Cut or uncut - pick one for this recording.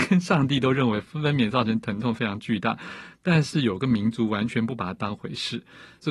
uncut